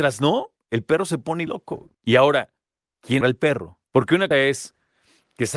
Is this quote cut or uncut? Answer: cut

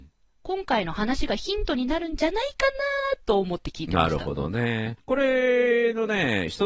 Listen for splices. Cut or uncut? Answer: cut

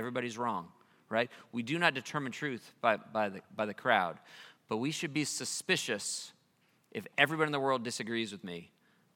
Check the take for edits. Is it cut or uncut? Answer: uncut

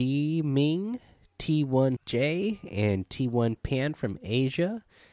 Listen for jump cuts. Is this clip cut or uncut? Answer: cut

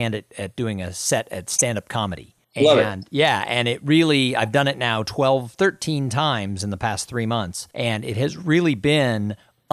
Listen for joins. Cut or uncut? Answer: cut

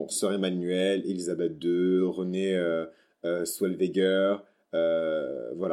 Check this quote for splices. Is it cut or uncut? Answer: uncut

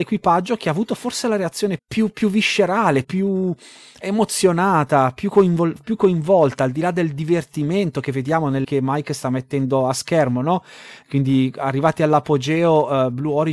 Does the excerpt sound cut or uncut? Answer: cut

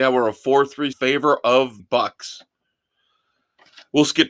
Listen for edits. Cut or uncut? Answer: cut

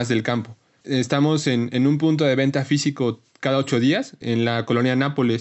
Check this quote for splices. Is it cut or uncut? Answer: uncut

